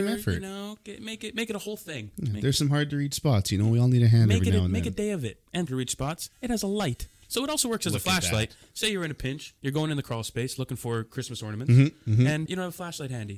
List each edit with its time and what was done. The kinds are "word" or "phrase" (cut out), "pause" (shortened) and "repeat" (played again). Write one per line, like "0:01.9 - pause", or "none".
0:05.7 - phrase
0:06.3 - pause
0:09.6 - pause
0:12.5 - word